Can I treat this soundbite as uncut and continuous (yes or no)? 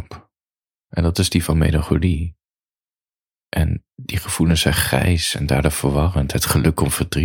yes